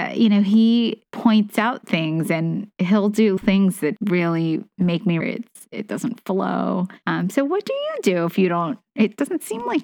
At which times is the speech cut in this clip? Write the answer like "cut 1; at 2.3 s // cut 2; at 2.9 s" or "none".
cut 1; at 1.1 s // cut 2; at 2.7 s // cut 3; at 3.4 s // cut 4; at 4.0 s // cut 5; at 5.2 s